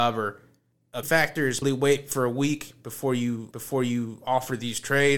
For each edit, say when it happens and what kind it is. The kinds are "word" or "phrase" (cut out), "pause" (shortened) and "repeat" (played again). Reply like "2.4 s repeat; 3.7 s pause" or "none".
1.0 s word; 1.6 s word; 3.5 s repeat